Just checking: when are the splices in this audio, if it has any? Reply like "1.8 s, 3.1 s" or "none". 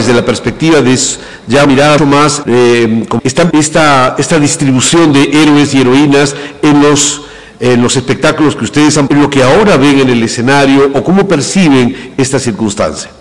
1.6 s, 2.0 s, 2.4 s, 3.2 s, 3.5 s, 9.1 s